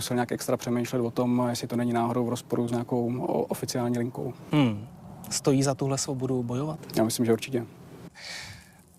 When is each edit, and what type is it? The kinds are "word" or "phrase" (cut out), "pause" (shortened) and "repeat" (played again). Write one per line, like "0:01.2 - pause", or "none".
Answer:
none